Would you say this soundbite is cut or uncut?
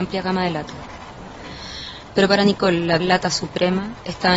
cut